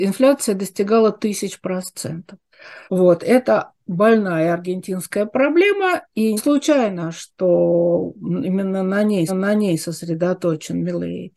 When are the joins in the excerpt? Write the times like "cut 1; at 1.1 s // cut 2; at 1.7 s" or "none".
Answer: cut 1; at 2.9 s // cut 2; at 6.4 s // cut 3; at 9.3 s